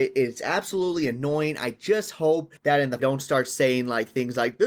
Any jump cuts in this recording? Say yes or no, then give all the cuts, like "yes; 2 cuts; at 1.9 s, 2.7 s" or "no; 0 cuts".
yes; 2 cuts; at 2.6 s, 3.0 s